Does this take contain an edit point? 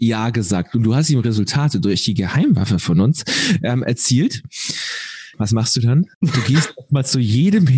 yes; 2 cuts; at 5.3 s, 6.1 s

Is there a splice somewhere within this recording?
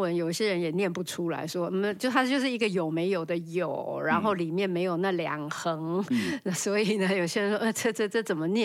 no; 0 cuts

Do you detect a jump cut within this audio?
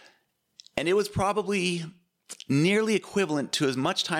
no; 0 cuts

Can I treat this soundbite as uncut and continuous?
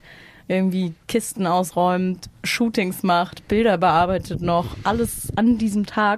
yes; 0 cuts

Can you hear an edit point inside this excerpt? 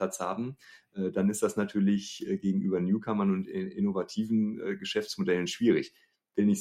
no; 0 cuts

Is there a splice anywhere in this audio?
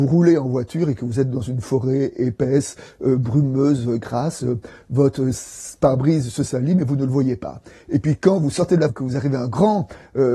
yes; 1 cut; at 8.9 s

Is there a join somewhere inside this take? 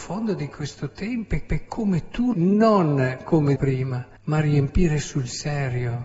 yes; 4 cuts; at 1.5 s, 2.3 s, 3.6 s, 4.2 s

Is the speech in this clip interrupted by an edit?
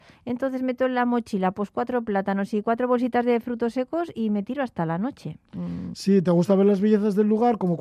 no; 0 cuts

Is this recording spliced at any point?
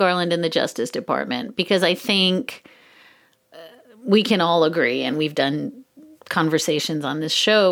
no; 0 cuts

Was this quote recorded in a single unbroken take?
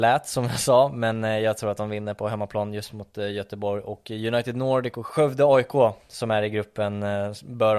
yes; 0 cuts

